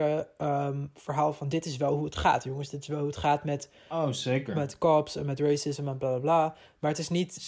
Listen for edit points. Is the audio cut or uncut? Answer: uncut